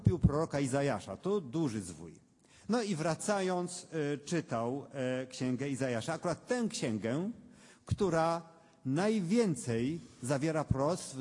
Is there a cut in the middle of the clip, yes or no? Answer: no